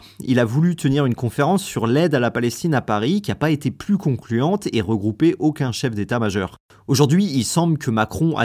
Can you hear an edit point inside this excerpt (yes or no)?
no